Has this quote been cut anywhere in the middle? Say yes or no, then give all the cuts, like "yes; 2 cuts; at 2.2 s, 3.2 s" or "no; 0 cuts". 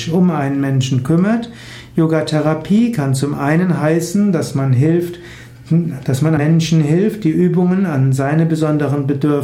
yes; 1 cut; at 6.4 s